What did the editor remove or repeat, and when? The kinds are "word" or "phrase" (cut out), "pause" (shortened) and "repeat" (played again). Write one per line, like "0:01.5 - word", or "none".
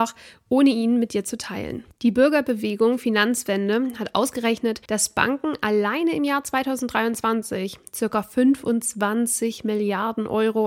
0:01.9 - pause
0:04.8 - pause